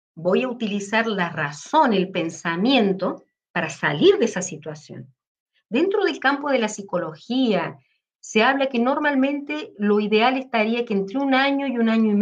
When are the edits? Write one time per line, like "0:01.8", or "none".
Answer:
none